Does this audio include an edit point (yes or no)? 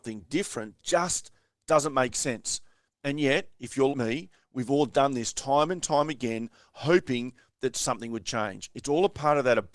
yes